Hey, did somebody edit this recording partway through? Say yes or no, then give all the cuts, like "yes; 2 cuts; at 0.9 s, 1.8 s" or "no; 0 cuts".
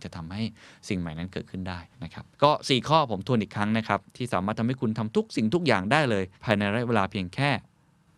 yes; 4 cuts; at 1.9 s, 2.3 s, 4.1 s, 6.3 s